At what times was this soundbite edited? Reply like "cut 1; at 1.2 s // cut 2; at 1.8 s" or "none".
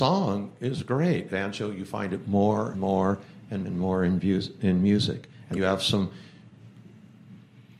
cut 1; at 1.3 s // cut 2; at 2.7 s // cut 3; at 3.6 s // cut 4; at 5.5 s